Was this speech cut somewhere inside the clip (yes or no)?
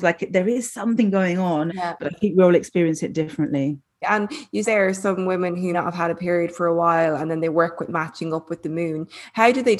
yes